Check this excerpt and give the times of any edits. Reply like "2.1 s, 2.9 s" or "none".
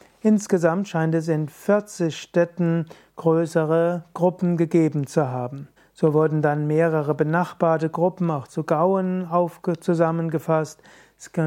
5.8 s

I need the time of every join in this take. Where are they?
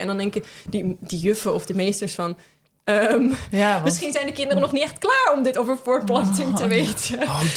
none

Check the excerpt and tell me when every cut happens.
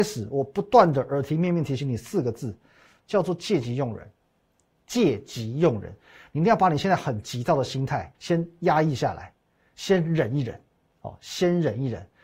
8.1 s

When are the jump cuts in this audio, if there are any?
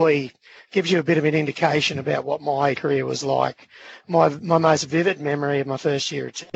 2.7 s

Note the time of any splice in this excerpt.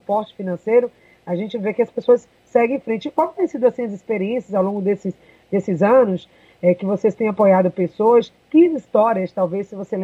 none

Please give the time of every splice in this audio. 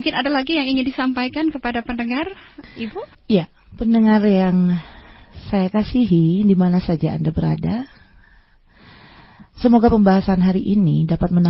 3.1 s

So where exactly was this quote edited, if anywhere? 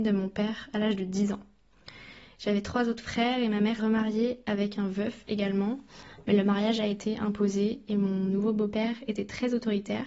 3.8 s

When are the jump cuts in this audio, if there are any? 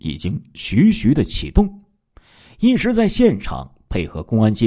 none

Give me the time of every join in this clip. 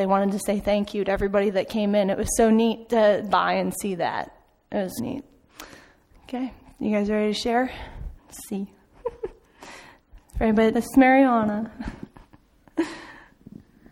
3.3 s, 5.0 s, 8.2 s, 9.4 s, 10.7 s

